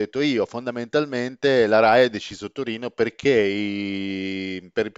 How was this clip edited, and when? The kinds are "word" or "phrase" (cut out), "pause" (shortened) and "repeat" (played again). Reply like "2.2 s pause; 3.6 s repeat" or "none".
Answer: none